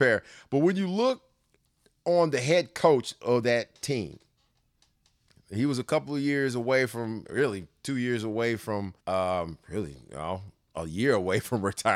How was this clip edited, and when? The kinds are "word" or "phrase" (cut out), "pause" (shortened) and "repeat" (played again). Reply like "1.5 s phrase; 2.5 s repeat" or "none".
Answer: 9.0 s pause